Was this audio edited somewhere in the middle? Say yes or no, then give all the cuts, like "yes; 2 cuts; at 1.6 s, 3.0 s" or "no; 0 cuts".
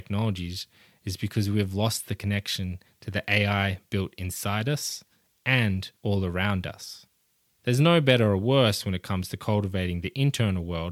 yes; 2 cuts; at 6.0 s, 7.5 s